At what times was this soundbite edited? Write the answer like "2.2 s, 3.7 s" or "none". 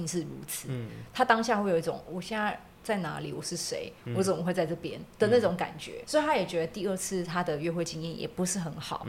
2.1 s, 2.7 s, 6.0 s